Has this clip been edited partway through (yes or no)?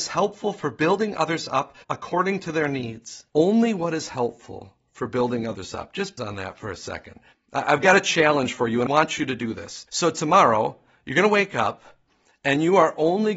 yes